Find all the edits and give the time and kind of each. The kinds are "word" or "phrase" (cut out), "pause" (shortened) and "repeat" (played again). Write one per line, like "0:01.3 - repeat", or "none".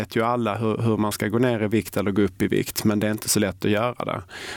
none